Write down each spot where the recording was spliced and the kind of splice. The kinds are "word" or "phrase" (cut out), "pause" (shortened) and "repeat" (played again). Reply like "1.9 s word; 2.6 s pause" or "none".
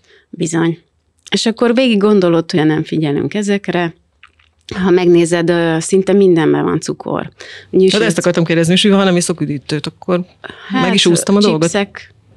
2.6 s word